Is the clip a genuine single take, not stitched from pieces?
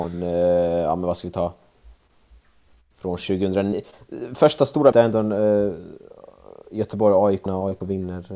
no; 2 cuts; at 4.9 s, 7.5 s

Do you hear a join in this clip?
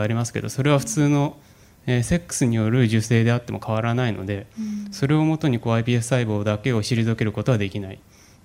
no; 0 cuts

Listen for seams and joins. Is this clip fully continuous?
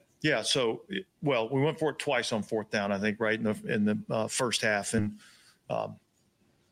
yes; 0 cuts

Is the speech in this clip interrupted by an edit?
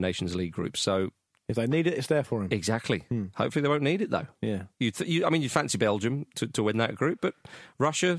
no; 0 cuts

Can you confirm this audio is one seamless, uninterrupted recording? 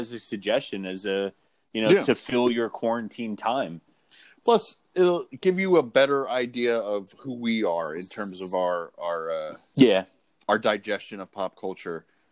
yes; 0 cuts

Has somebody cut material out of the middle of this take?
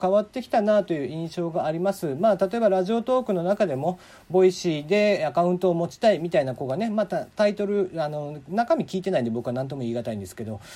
no; 0 cuts

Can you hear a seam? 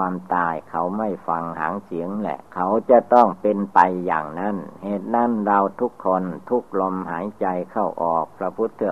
yes; 1 cut; at 2.5 s

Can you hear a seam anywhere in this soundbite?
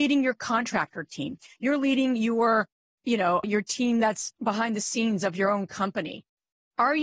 no; 0 cuts

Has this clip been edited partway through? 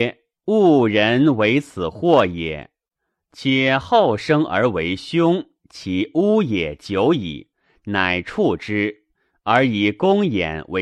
yes; 1 cut; at 7.5 s

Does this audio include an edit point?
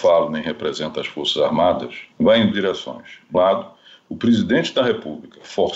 yes; 3 cuts; at 2.1 s, 2.5 s, 3.3 s

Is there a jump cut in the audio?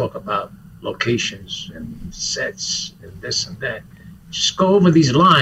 no; 0 cuts

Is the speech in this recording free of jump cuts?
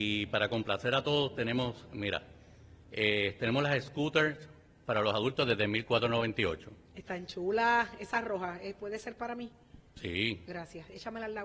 yes; 0 cuts

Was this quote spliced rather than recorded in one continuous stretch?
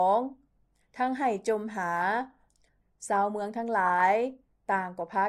no; 0 cuts

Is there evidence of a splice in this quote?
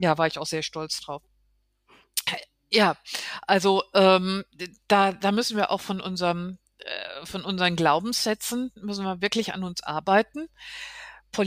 no; 0 cuts

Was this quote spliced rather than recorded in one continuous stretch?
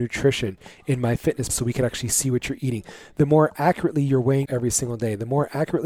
yes; 2 cuts; at 1.5 s, 4.5 s

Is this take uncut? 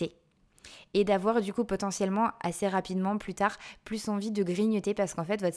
yes; 0 cuts

